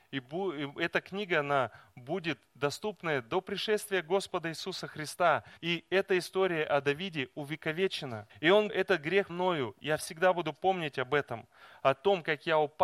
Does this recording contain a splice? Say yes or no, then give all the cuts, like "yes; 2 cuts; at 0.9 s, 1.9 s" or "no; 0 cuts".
yes; 4 cuts; at 5.6 s, 8.3 s, 8.7 s, 9.3 s